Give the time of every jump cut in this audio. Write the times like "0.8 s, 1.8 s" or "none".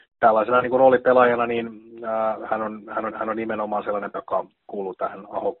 3.1 s, 4.1 s, 4.5 s